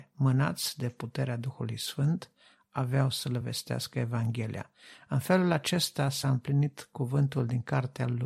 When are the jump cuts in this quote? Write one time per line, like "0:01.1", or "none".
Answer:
none